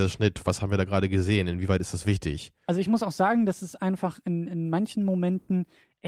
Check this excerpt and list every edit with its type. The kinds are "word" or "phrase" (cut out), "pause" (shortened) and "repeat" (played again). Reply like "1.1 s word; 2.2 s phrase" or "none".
none